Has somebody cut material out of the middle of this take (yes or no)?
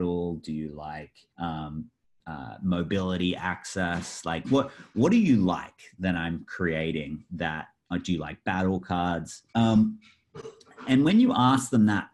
yes